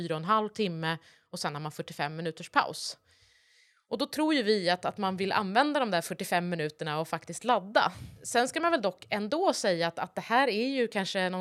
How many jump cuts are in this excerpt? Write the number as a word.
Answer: zero